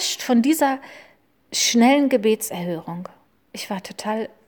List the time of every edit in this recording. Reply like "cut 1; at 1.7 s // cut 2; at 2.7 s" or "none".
none